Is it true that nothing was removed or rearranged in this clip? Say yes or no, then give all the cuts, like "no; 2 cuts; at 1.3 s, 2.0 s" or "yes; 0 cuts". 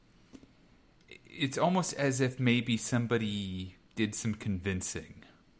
no; 1 cut; at 3.9 s